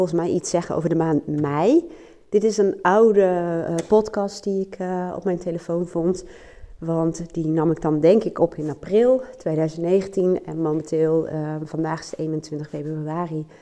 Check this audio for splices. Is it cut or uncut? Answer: uncut